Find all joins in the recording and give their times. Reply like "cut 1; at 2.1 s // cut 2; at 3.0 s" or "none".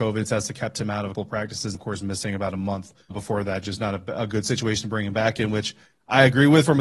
cut 1; at 1.1 s // cut 2; at 1.7 s // cut 3; at 3.1 s